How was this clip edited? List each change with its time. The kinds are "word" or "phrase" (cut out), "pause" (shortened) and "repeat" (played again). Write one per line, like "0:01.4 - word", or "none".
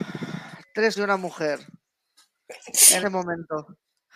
0:01.0 - word
0:03.0 - word